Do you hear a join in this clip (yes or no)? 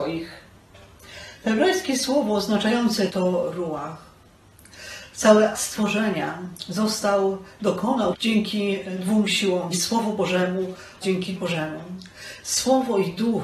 yes